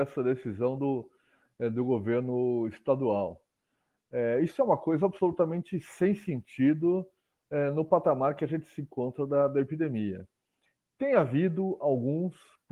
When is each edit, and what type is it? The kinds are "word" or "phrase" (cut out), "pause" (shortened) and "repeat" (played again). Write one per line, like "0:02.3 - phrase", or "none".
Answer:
none